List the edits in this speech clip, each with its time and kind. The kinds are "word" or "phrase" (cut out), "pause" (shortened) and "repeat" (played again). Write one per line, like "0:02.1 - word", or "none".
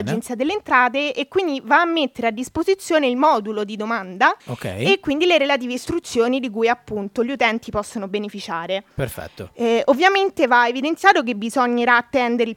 0:04.4 - pause
0:08.9 - pause